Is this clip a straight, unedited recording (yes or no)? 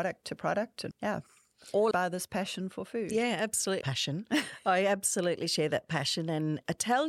no